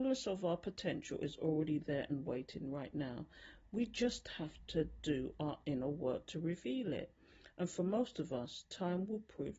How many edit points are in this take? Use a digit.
0